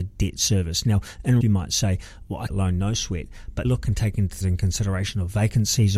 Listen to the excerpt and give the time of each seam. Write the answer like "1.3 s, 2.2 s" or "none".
1.4 s, 2.5 s, 3.6 s, 4.4 s